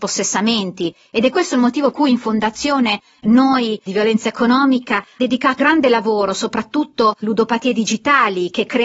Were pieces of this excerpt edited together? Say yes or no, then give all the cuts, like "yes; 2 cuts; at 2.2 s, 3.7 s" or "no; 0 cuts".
yes; 5 cuts; at 1.9 s, 3.9 s, 5.2 s, 5.6 s, 7.2 s